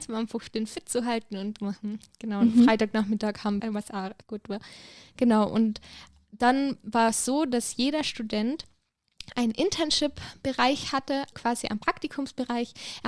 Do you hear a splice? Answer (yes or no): yes